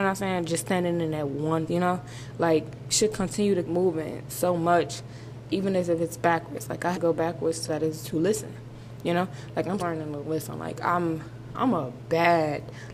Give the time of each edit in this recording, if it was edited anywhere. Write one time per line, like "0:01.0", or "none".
0:01.7
0:02.9
0:03.6
0:05.5
0:06.9
0:07.7
0:08.0
0:09.8